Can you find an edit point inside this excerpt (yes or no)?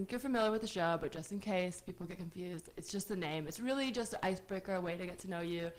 no